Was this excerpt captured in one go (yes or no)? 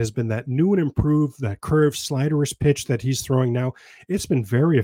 yes